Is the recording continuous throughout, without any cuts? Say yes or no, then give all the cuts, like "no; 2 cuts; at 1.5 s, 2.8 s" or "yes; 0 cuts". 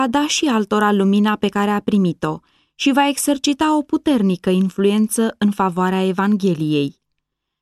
yes; 0 cuts